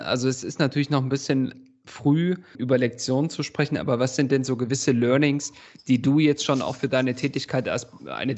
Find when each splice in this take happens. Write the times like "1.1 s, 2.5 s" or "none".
2.5 s